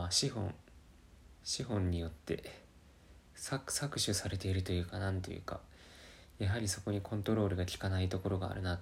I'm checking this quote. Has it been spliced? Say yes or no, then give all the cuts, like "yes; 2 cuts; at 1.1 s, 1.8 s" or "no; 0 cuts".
yes; 1 cut; at 1.4 s